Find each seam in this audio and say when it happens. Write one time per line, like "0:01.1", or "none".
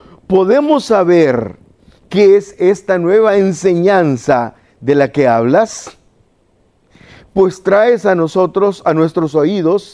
none